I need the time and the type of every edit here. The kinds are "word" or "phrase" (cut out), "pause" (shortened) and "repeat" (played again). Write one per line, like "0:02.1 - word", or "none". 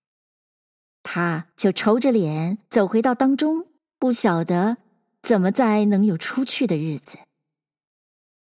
0:01.5 - pause
0:02.7 - pause
0:03.8 - pause